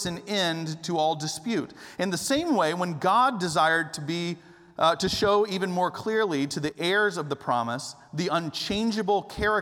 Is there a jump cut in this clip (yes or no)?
no